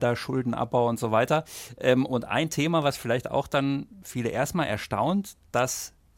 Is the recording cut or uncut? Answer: uncut